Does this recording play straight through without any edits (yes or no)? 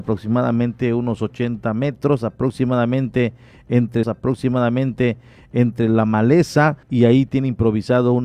no